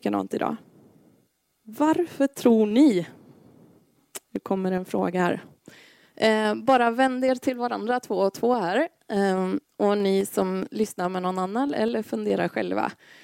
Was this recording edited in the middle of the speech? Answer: yes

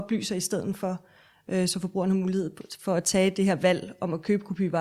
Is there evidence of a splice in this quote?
no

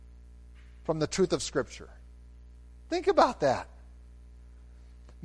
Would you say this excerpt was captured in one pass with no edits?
yes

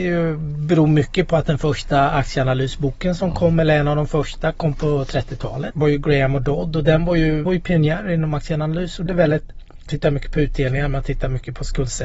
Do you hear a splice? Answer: yes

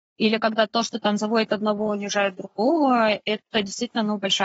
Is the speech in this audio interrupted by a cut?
no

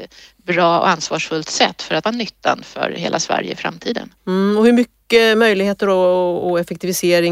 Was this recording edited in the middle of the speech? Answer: yes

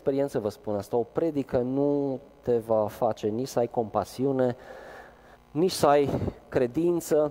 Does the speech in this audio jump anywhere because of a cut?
yes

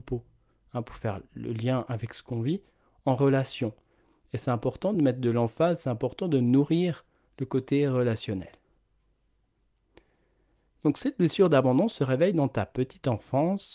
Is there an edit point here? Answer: no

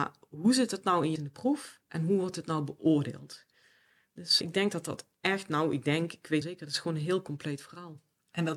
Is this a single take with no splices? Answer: no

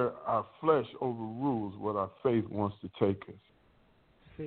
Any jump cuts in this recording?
no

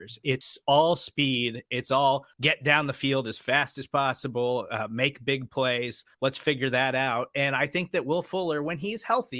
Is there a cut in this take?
yes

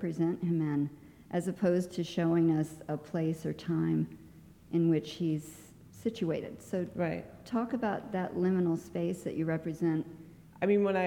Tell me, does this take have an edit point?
no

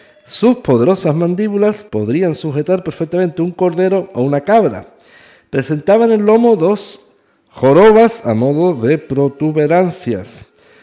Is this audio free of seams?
no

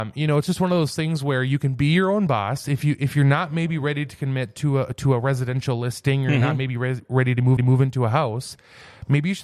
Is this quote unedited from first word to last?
no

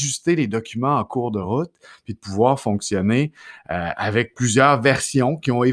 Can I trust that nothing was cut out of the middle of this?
yes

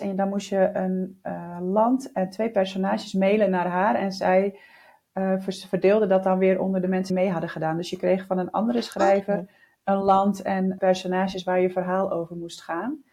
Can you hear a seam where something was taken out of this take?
yes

